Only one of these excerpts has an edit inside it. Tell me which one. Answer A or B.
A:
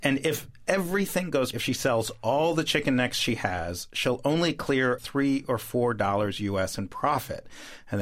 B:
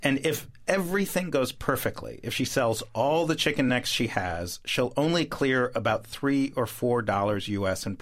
A